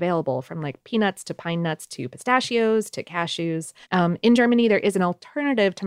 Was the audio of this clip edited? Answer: yes; 1 cut; at 3.8 s

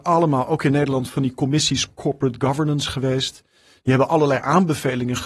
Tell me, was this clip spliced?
no; 0 cuts

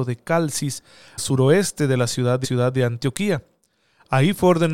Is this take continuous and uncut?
no; 2 cuts; at 1.2 s, 2.4 s

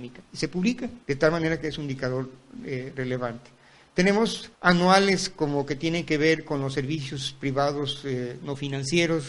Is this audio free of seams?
no; 2 cuts; at 1.0 s, 4.5 s

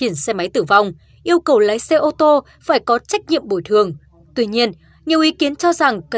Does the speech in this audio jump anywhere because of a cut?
no; 0 cuts

